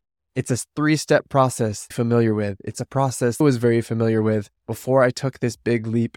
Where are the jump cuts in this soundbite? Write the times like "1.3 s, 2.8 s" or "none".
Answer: 1.9 s, 3.4 s, 4.6 s